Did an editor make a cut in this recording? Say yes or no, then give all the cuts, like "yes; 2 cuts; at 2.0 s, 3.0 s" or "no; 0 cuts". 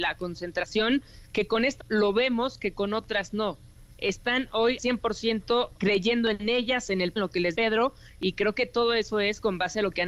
yes; 5 cuts; at 1.8 s, 4.8 s, 5.8 s, 7.2 s, 7.5 s